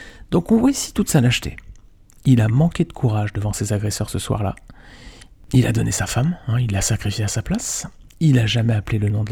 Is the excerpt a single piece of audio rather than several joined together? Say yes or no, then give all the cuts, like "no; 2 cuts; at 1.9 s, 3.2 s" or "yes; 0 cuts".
yes; 0 cuts